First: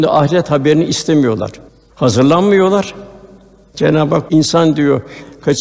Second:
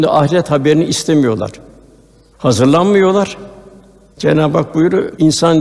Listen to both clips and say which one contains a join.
first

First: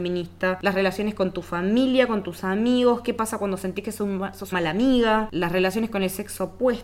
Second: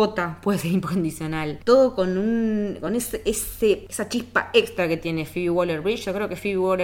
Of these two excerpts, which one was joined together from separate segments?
first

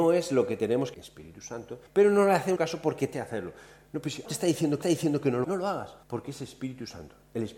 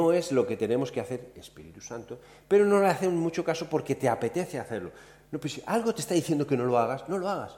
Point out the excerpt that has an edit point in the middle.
first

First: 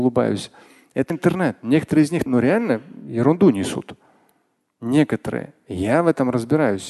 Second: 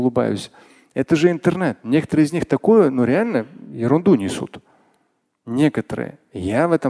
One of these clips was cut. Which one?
first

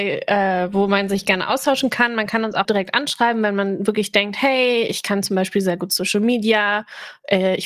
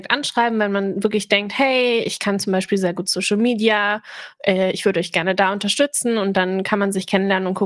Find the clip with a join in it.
first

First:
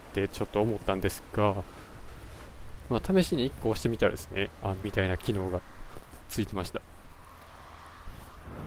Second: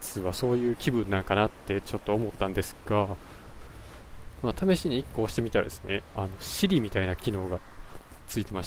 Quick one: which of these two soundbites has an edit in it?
first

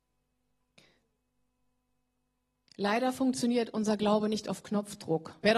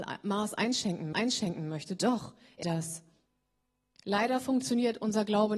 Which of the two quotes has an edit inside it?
second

